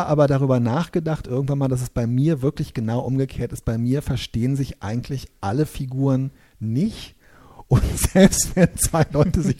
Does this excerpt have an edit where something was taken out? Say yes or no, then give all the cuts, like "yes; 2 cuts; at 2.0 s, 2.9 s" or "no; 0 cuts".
no; 0 cuts